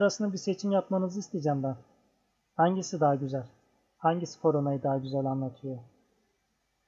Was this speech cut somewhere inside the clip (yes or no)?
no